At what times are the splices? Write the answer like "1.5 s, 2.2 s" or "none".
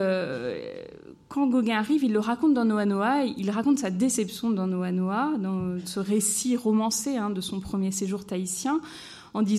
none